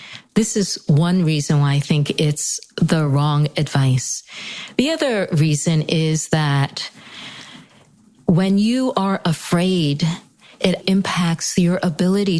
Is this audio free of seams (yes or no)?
no